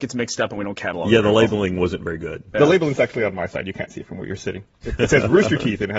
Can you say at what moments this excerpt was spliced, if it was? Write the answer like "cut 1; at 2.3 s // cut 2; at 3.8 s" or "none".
none

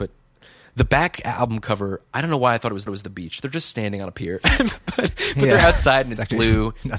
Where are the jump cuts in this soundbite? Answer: cut 1; at 2.9 s

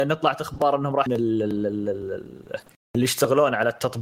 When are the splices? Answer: cut 1; at 1.1 s

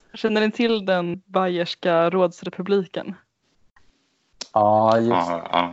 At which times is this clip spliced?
cut 1; at 1.1 s

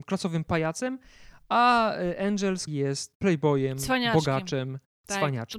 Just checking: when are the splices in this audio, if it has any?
cut 1; at 2.7 s // cut 2; at 3.1 s

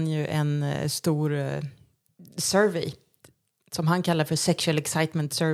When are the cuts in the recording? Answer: none

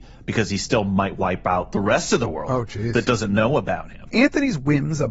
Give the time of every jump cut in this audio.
none

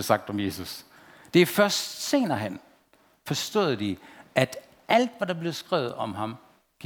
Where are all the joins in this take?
none

